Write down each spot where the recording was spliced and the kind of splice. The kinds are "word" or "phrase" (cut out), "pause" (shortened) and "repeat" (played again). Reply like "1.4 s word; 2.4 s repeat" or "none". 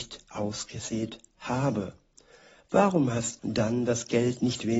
3.4 s word

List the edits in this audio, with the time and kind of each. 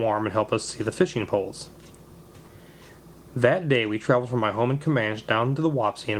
none

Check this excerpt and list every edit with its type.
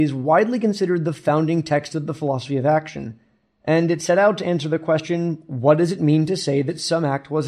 none

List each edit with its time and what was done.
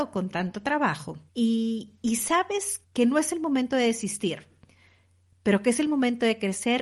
1.3 s pause; 2.8 s word

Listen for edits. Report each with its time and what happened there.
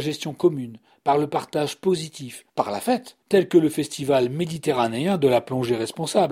2.5 s pause; 3.2 s pause

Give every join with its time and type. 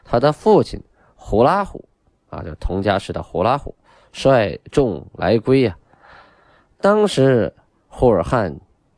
none

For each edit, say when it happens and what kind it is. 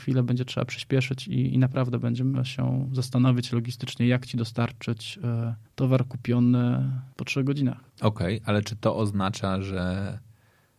5.6 s pause; 7.1 s pause; 7.9 s pause

